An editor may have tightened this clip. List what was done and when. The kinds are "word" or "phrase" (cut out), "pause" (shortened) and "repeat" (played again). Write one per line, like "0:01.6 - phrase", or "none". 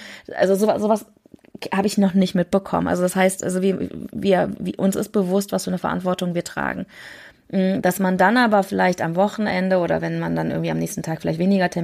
none